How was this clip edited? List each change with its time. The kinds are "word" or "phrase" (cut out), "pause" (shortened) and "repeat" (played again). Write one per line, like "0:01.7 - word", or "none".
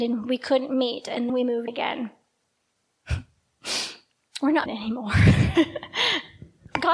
0:01.3 - word
0:01.7 - word
0:04.7 - word